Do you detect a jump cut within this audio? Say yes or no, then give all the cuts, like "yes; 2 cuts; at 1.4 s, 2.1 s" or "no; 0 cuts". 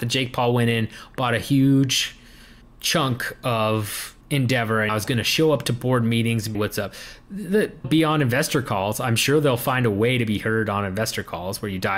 yes; 5 cuts; at 2.6 s, 4.2 s, 4.9 s, 6.5 s, 7.8 s